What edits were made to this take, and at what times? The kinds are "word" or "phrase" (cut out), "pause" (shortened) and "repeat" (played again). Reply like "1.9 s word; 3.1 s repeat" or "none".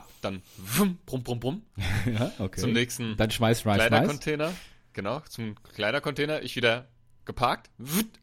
none